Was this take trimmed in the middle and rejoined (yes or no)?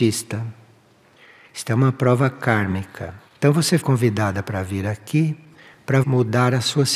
yes